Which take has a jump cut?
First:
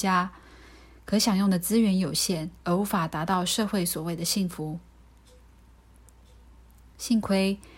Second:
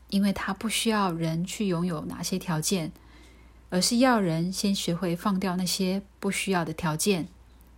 first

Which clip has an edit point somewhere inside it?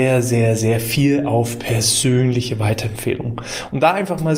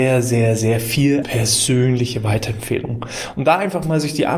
second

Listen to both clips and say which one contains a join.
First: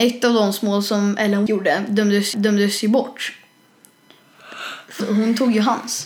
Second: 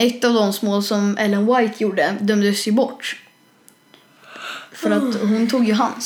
first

